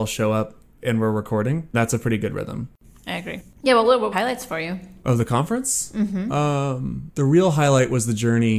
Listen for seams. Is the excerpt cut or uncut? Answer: cut